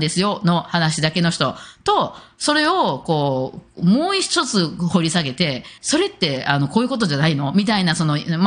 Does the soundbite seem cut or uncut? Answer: cut